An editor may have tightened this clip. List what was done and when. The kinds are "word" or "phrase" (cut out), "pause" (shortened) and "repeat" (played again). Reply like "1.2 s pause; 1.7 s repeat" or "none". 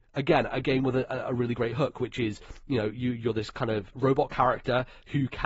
3.9 s word